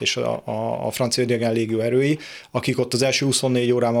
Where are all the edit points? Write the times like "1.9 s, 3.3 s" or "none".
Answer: none